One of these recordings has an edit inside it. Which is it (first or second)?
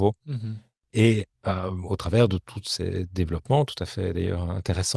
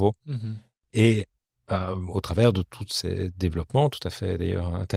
first